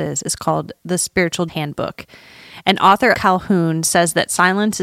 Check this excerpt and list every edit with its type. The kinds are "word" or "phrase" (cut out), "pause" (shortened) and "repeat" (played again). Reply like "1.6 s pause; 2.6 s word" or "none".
1.5 s word; 3.1 s word